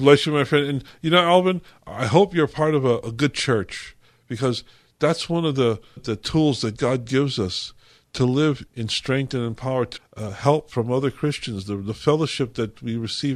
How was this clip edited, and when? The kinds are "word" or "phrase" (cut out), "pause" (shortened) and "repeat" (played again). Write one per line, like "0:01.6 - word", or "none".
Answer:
0:03.0 - word
0:06.0 - word
0:08.7 - word
0:10.0 - word